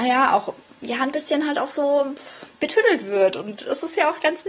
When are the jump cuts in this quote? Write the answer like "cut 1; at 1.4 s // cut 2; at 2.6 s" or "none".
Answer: none

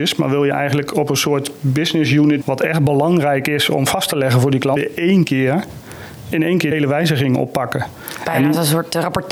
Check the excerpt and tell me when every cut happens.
cut 1; at 2.4 s // cut 2; at 4.8 s // cut 3; at 6.7 s

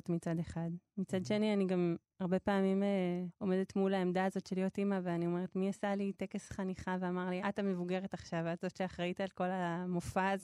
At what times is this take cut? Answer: cut 1; at 3.3 s // cut 2; at 7.4 s

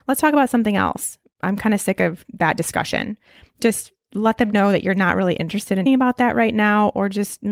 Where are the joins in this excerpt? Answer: cut 1; at 5.9 s

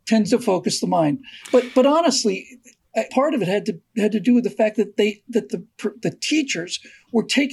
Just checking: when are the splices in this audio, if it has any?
cut 1; at 1.4 s // cut 2; at 3.1 s // cut 3; at 5.5 s

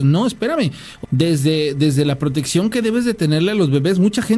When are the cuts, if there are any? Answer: cut 1; at 1.0 s

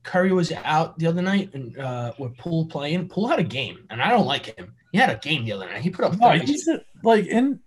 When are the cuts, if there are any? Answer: cut 1; at 4.8 s

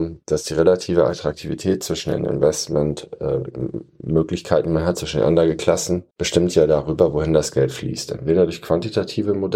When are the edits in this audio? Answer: cut 1; at 6.1 s

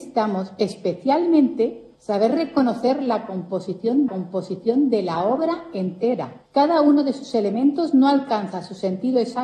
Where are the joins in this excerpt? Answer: cut 1; at 2.0 s // cut 2; at 4.1 s // cut 3; at 6.5 s

